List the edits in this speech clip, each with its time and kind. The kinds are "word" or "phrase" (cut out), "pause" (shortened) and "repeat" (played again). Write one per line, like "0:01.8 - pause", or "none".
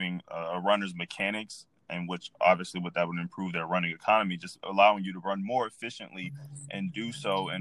none